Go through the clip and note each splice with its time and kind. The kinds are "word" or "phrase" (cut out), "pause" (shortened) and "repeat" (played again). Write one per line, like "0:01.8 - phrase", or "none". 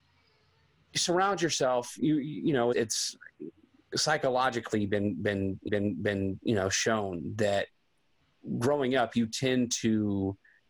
0:02.7 - word
0:05.7 - repeat